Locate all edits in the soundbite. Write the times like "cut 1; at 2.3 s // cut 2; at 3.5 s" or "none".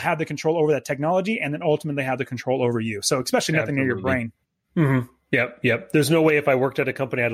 none

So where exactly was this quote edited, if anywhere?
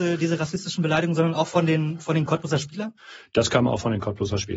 none

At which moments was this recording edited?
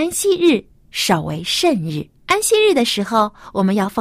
cut 1; at 2.2 s

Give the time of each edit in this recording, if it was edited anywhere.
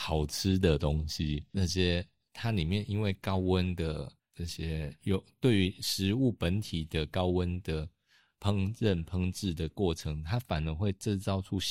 cut 1; at 1.5 s // cut 2; at 4.2 s

